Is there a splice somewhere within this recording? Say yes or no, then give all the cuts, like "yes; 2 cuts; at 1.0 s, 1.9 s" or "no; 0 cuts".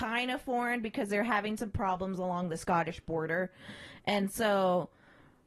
no; 0 cuts